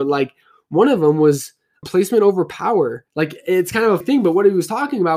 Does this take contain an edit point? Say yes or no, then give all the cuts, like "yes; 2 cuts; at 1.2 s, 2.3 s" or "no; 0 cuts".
yes; 3 cuts; at 1.8 s, 3.1 s, 4.0 s